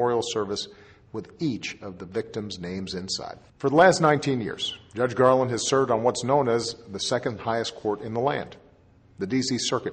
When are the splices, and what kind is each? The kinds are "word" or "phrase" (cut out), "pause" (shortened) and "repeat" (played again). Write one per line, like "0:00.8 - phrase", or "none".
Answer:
0:03.5 - pause